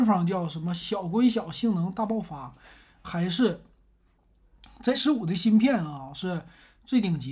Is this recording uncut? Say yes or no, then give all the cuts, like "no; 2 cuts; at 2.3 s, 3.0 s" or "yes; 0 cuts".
no; 2 cuts; at 3.0 s, 4.9 s